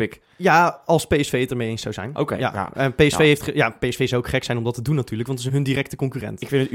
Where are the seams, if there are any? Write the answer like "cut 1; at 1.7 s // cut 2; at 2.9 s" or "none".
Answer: cut 1; at 5.5 s